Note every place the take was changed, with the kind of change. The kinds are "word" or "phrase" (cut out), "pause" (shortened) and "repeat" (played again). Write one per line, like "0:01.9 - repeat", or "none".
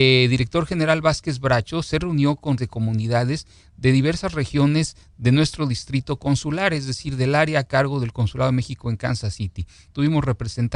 0:02.6 - word